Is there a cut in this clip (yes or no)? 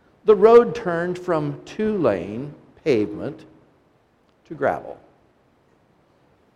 no